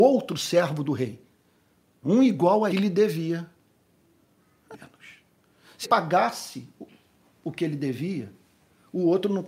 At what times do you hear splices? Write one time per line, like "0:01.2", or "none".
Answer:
0:02.0
0:02.7
0:04.7
0:05.8